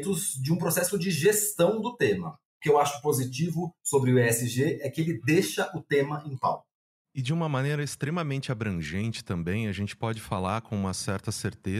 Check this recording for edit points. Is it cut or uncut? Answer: uncut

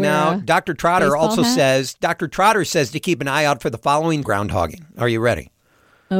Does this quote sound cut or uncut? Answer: cut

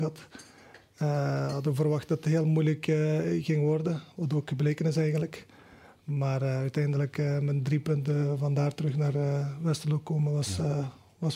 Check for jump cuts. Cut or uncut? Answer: uncut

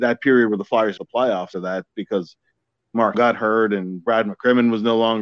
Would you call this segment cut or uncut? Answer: cut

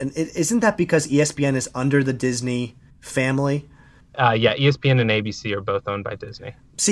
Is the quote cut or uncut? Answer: cut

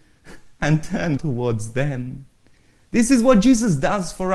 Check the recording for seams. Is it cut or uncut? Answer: cut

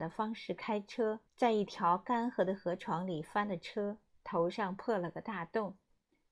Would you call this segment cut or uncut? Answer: cut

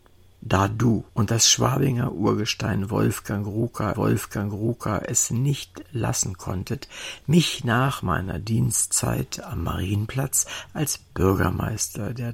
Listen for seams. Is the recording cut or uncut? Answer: cut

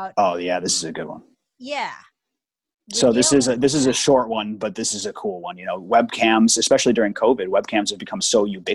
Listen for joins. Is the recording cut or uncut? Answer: uncut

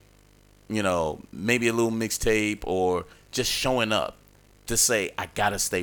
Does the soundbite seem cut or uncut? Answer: uncut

